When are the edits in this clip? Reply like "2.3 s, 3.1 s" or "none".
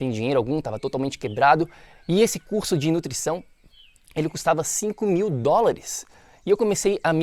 none